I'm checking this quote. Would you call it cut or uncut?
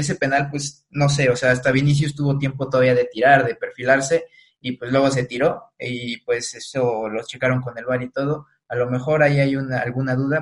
uncut